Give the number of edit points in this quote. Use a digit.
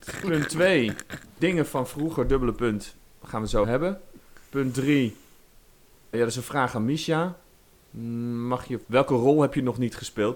4